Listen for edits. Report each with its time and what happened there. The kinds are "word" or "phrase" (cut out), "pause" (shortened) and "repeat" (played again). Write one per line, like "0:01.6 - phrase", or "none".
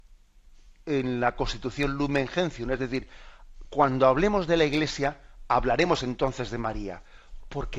none